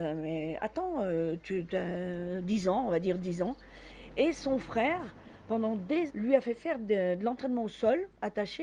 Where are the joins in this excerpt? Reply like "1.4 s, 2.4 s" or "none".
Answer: 6.1 s